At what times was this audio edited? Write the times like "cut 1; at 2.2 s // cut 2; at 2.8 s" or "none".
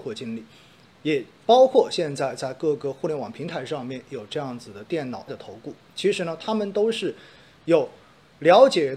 cut 1; at 5.3 s